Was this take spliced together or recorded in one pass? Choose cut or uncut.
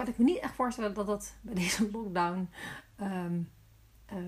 uncut